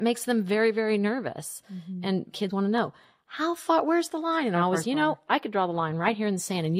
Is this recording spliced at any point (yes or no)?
yes